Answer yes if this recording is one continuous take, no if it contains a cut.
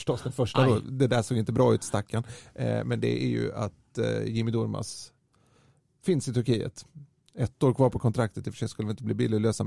yes